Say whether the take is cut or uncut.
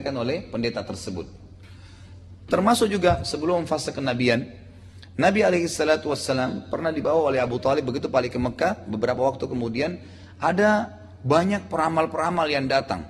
uncut